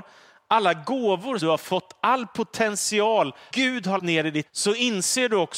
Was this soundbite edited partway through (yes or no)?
yes